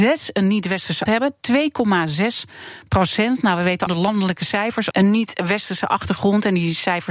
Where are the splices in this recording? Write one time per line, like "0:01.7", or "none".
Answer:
0:01.1
0:03.9
0:04.9